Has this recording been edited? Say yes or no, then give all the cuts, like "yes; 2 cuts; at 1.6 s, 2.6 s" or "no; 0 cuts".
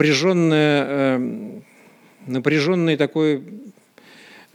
no; 0 cuts